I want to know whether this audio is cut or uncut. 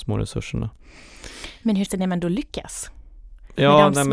cut